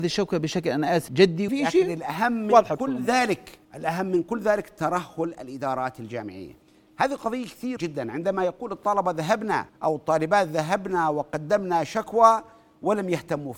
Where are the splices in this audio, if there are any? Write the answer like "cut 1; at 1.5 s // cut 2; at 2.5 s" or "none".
cut 1; at 1.1 s // cut 2; at 1.5 s // cut 3; at 3.6 s // cut 4; at 6.6 s // cut 5; at 7.8 s // cut 6; at 9.7 s